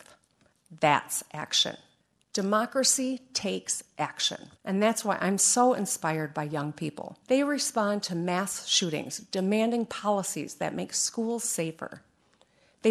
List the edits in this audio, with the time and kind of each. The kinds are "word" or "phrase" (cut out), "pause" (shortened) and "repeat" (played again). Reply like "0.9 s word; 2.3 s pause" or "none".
2.0 s pause; 4.6 s pause; 7.2 s pause